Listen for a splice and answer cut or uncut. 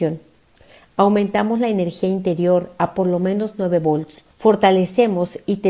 cut